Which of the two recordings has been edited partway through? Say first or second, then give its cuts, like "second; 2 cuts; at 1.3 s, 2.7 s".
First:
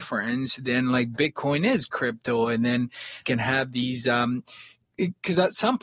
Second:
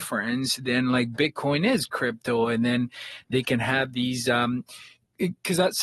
first; 1 cut; at 3.2 s